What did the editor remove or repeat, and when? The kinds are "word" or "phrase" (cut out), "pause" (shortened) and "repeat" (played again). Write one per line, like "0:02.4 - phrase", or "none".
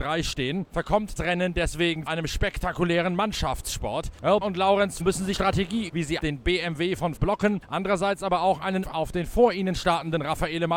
0:01.2 - word
0:02.1 - word
0:04.4 - word
0:05.0 - word
0:05.3 - word
0:05.9 - word
0:06.2 - word
0:07.2 - word
0:08.8 - word